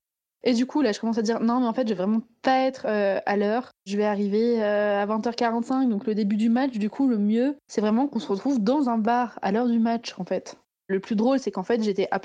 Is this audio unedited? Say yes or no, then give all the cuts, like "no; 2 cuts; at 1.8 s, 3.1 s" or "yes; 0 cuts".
yes; 0 cuts